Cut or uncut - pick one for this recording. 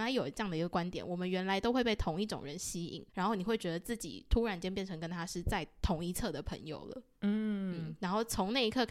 cut